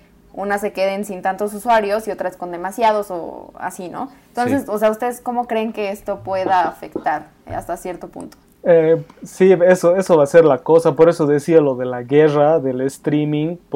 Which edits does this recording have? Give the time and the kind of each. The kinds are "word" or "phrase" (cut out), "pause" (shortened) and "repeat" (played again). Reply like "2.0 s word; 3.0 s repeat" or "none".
8.5 s pause